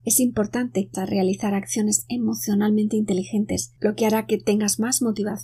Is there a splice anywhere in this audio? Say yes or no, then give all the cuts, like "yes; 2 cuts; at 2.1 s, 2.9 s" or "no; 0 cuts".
yes; 2 cuts; at 0.9 s, 3.8 s